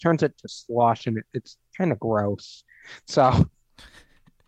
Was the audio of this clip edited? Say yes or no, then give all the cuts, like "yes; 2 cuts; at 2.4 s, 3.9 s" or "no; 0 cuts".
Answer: no; 0 cuts